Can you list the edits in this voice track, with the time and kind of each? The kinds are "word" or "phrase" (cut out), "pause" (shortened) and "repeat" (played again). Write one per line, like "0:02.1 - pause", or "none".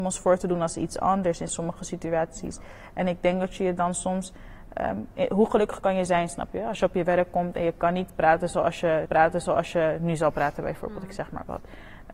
0:09.1 - repeat